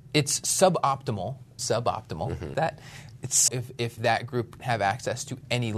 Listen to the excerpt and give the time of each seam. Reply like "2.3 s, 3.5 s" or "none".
1.6 s, 2.5 s, 3.5 s, 4.0 s, 4.6 s